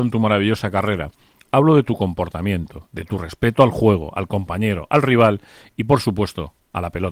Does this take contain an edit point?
no; 0 cuts

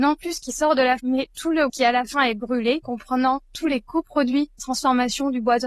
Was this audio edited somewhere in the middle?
yes; 4 cuts; at 1.0 s, 1.7 s, 2.8 s, 4.6 s

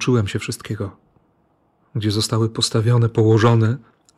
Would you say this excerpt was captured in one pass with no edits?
yes; 0 cuts

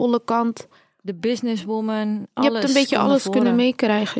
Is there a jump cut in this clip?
no; 0 cuts

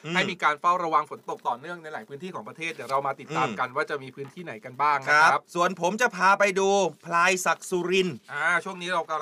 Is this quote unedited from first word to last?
no; 1 cut; at 5.5 s

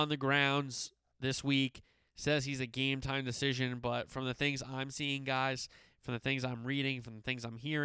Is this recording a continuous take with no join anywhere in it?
yes; 0 cuts

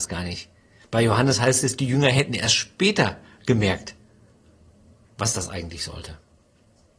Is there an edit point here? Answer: no; 0 cuts

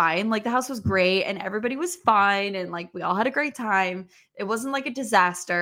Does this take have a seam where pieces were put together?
no; 0 cuts

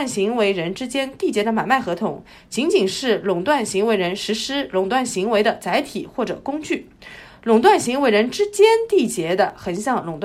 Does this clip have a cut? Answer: no; 0 cuts

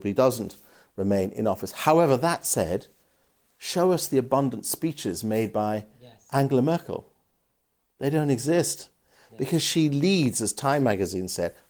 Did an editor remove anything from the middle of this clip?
no; 0 cuts

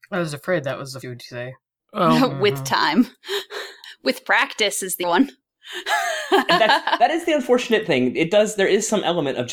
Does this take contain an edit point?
yes; 3 cuts; at 1.0 s, 1.8 s, 5.0 s

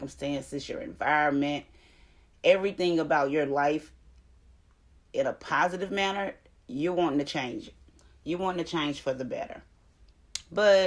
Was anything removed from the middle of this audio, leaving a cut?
no; 0 cuts

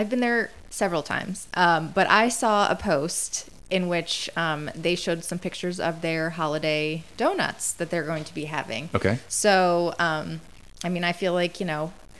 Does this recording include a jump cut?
yes; 1 cut; at 3.6 s

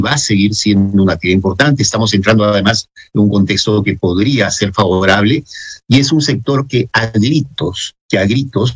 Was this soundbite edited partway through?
no; 0 cuts

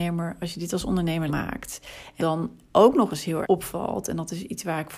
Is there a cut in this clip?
yes; 3 cuts; at 1.3 s, 2.2 s, 3.4 s

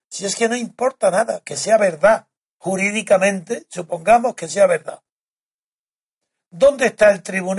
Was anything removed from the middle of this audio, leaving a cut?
no; 0 cuts

